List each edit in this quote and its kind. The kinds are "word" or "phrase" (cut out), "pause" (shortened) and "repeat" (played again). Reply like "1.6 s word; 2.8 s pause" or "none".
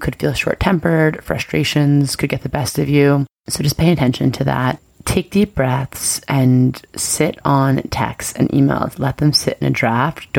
none